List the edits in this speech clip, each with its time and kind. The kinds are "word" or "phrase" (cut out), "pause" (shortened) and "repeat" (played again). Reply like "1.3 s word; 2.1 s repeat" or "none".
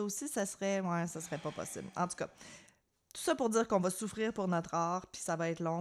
none